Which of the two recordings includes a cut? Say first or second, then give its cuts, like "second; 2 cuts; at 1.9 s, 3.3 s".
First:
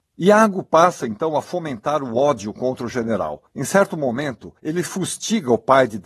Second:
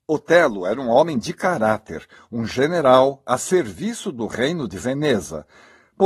first; 2 cuts; at 3.5 s, 4.6 s